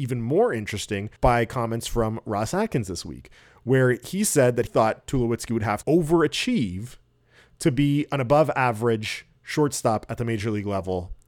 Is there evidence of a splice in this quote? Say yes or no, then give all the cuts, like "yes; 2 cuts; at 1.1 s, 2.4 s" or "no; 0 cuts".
yes; 3 cuts; at 1.2 s, 4.7 s, 5.8 s